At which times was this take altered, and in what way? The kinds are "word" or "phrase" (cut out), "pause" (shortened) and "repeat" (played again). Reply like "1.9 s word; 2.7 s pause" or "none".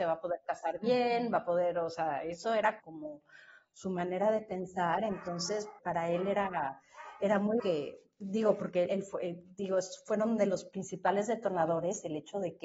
2.8 s word; 5.8 s word; 7.6 s word; 8.9 s word